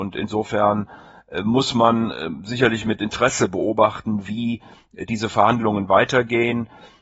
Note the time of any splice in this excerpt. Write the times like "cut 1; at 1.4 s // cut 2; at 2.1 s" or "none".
none